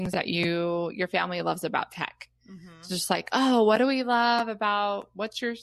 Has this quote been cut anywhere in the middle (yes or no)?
no